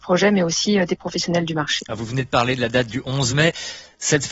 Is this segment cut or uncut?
uncut